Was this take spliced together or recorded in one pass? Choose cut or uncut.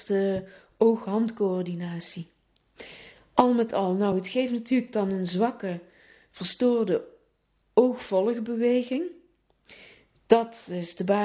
uncut